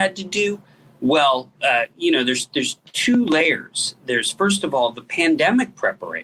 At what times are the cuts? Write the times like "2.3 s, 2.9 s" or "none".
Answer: none